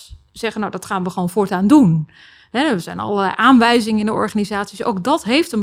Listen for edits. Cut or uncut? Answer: uncut